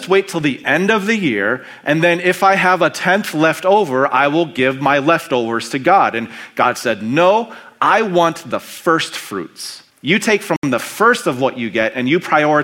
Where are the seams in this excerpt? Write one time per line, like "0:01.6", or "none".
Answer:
0:09.9